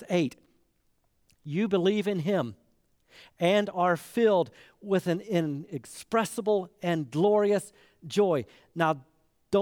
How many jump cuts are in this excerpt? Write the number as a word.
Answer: zero